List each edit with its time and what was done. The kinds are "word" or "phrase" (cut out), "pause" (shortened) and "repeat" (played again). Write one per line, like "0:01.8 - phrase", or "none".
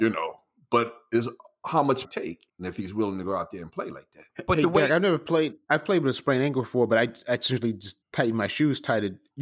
0:02.0 - phrase
0:02.5 - pause
0:08.0 - pause